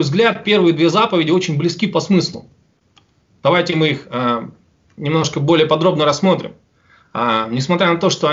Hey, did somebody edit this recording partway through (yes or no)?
no